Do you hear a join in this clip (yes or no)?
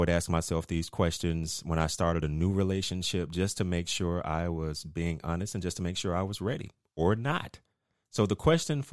no